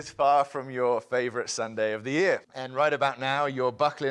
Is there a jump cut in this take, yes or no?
yes